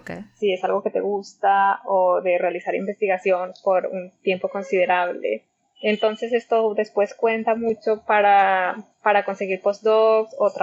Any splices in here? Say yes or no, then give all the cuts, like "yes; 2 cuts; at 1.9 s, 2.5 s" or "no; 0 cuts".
yes; 1 cut; at 8.9 s